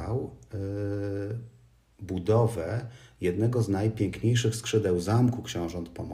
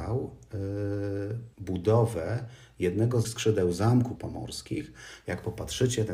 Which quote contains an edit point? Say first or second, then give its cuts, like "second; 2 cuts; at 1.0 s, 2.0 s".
second; 3 cuts; at 1.5 s, 3.2 s, 4.2 s